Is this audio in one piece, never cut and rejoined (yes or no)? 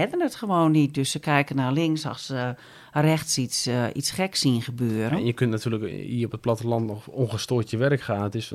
yes